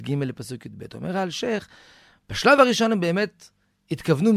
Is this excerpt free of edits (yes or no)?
yes